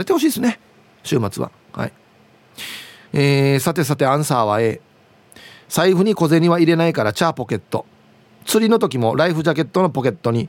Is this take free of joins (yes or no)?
yes